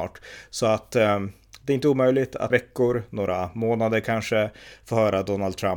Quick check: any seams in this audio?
yes; 1 cut; at 2.5 s

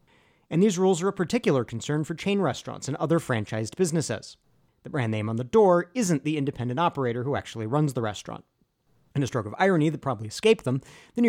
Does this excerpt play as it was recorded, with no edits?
yes; 0 cuts

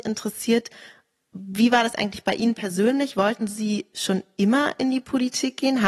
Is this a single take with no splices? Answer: yes; 0 cuts

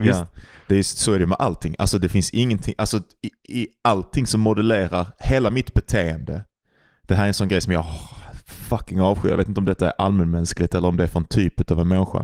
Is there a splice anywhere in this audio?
no; 0 cuts

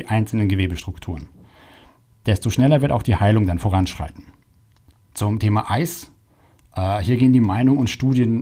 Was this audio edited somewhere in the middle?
no; 0 cuts

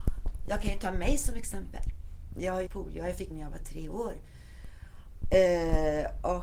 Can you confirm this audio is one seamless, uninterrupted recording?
no; 2 cuts; at 2.7 s, 3.3 s

